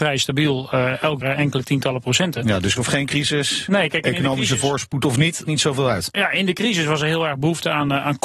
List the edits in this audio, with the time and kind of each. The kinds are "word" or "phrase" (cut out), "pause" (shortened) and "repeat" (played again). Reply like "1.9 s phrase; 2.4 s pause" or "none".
1.2 s word; 2.8 s word; 5.4 s word